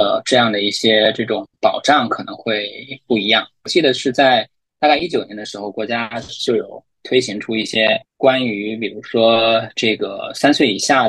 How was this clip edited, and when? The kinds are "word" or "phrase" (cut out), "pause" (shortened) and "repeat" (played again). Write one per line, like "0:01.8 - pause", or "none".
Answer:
0:08.0 - pause